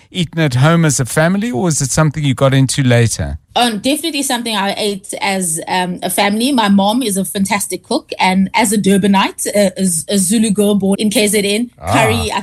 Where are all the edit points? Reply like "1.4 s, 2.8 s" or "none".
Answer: 3.4 s, 10.9 s